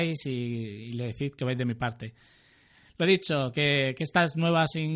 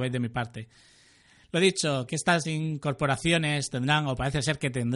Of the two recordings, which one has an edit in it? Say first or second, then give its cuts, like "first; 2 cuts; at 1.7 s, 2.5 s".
second; 2 cuts; at 2.1 s, 2.4 s